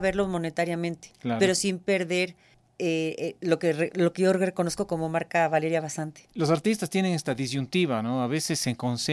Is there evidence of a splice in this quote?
no; 0 cuts

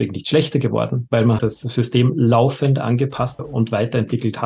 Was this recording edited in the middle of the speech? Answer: yes; 2 cuts; at 1.4 s, 3.4 s

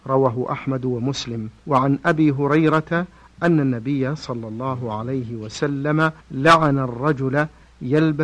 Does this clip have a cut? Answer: yes; 2 cuts; at 1.6 s, 6.2 s

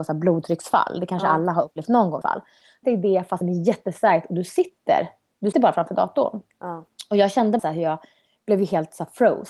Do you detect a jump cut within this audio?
yes; 5 cuts; at 2.2 s, 2.8 s, 3.4 s, 5.5 s, 7.6 s

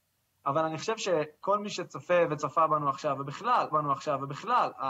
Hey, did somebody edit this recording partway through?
yes; 1 cut; at 3.7 s

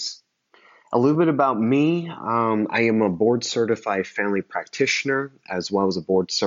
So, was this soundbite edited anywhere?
no; 0 cuts

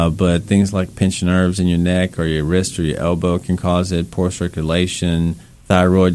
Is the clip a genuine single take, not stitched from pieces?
yes; 0 cuts

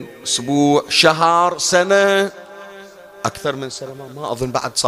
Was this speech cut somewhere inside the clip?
no; 0 cuts

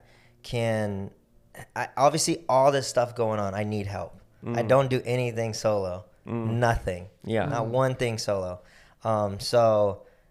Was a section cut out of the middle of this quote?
no; 0 cuts

